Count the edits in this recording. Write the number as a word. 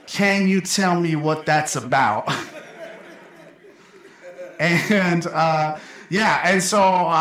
zero